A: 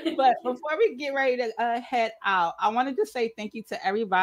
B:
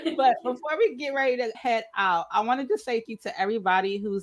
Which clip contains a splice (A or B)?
B